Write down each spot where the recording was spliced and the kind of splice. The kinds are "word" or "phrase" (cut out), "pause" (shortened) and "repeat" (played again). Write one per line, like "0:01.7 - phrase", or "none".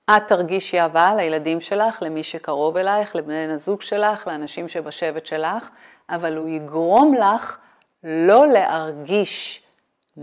none